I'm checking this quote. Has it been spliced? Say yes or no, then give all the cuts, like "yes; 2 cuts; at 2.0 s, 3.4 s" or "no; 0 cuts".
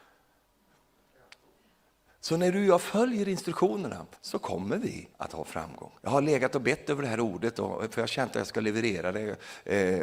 yes; 3 cuts; at 4.1 s, 5.1 s, 6.0 s